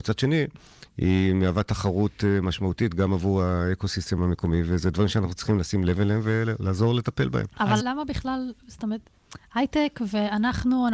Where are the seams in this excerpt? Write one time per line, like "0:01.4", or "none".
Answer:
0:07.8